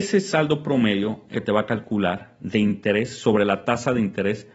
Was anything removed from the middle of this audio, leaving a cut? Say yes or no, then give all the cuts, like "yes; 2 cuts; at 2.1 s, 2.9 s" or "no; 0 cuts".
yes; 1 cut; at 1.3 s